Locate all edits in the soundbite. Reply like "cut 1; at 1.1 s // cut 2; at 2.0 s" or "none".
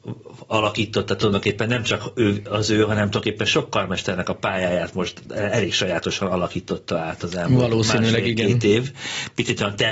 none